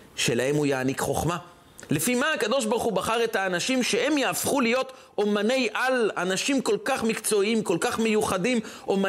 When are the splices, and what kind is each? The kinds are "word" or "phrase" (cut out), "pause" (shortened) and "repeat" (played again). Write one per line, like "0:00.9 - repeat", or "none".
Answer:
none